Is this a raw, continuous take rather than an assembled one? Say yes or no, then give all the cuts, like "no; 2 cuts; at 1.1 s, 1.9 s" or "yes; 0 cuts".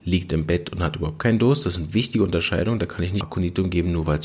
no; 1 cut; at 3.2 s